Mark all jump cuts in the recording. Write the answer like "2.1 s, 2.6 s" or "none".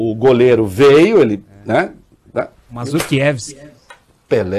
none